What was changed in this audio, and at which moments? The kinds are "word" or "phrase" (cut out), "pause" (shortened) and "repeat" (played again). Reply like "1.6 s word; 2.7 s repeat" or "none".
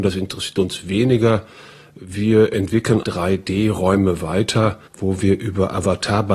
3.0 s word; 4.9 s pause